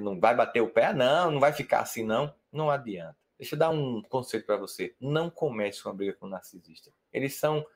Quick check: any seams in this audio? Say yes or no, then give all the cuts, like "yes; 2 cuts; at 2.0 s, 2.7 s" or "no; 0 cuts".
no; 0 cuts